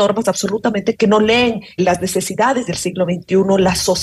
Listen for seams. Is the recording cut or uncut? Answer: cut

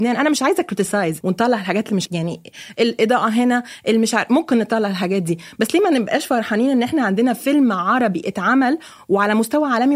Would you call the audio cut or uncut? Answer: cut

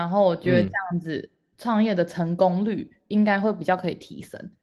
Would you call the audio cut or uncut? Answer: uncut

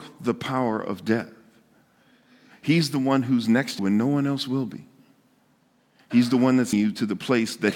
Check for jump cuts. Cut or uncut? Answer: cut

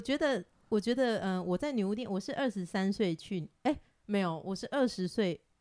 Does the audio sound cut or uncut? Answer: uncut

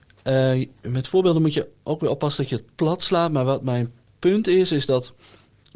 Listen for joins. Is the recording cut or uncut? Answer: uncut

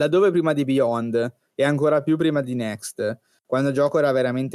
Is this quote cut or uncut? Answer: uncut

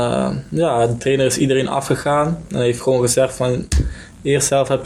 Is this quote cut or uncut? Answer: uncut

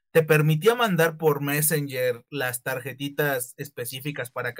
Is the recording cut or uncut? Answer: uncut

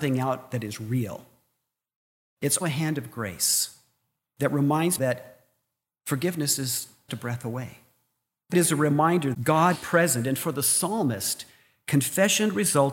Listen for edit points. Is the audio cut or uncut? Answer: cut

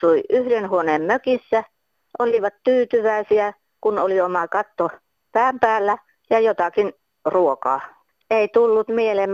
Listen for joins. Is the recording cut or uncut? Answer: uncut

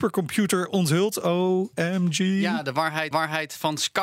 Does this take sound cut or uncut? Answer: cut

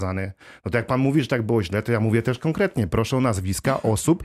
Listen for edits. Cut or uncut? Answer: uncut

